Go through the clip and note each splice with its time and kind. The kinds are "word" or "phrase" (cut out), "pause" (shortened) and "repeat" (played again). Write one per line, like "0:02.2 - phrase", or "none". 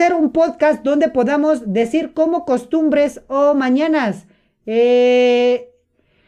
none